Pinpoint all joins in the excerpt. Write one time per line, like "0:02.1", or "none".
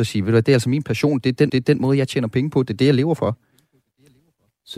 0:01.5